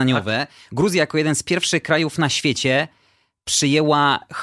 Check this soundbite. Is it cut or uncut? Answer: uncut